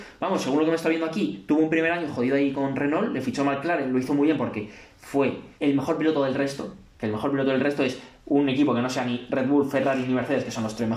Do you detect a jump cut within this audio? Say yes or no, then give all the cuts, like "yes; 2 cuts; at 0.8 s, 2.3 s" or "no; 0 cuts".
yes; 1 cut; at 5.6 s